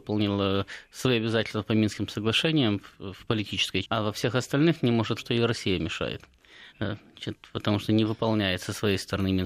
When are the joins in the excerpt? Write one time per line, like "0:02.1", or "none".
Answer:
0:02.9
0:03.8
0:05.2
0:06.7